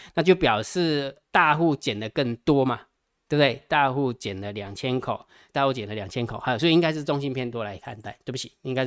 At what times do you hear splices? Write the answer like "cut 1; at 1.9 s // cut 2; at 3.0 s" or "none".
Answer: cut 1; at 1.2 s // cut 2; at 5.5 s